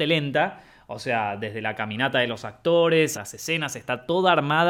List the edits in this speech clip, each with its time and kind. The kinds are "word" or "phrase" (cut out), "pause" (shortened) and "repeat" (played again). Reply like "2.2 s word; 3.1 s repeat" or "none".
3.1 s word